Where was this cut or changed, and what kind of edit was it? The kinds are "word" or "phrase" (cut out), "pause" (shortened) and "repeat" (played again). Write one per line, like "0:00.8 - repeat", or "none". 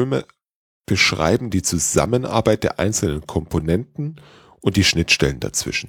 none